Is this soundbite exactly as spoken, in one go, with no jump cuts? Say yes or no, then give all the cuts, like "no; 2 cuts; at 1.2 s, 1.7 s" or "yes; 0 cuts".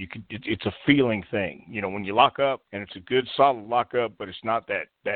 no; 1 cut; at 2.7 s